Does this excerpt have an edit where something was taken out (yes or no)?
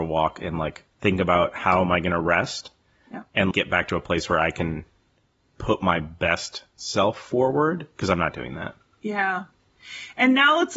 yes